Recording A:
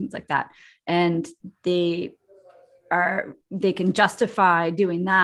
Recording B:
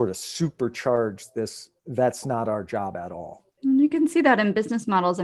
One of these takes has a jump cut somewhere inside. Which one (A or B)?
B